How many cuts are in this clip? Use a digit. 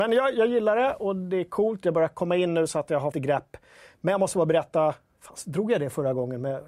1